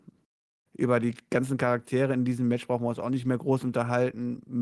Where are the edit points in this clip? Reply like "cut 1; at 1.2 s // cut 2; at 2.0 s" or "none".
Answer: none